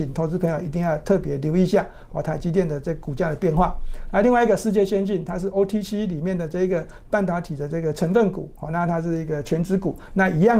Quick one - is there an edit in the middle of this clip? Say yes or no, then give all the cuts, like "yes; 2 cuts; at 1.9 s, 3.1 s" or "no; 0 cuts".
no; 0 cuts